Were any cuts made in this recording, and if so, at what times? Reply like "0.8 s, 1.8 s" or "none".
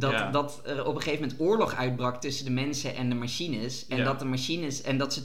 none